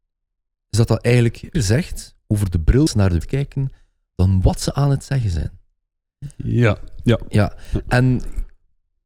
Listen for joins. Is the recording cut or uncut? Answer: cut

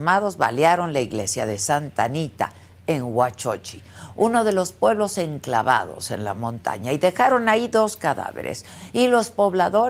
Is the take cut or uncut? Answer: uncut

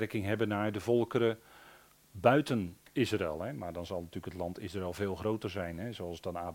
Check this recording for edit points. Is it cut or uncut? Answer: uncut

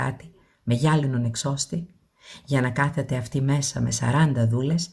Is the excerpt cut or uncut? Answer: uncut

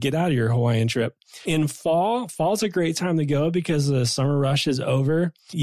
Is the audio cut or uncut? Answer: uncut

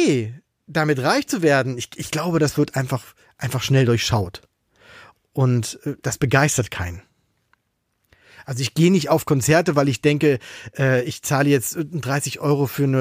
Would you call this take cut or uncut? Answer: uncut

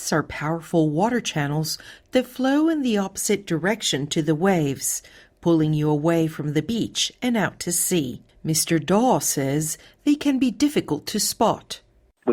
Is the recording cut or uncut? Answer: uncut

